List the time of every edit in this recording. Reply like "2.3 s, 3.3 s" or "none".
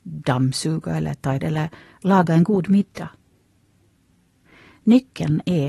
1.4 s

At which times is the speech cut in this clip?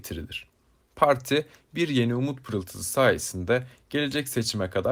none

